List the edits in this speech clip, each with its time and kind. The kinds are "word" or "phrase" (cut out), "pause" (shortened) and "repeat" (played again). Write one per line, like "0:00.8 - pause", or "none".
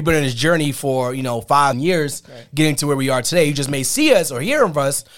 0:01.7 - phrase